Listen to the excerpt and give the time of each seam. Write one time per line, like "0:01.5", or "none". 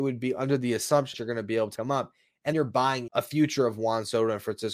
0:01.1
0:01.8
0:02.5
0:03.1